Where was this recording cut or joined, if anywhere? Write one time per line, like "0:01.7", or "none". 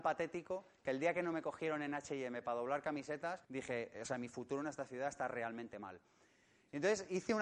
0:03.4